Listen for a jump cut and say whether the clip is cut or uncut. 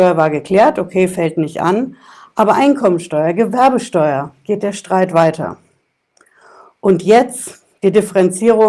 uncut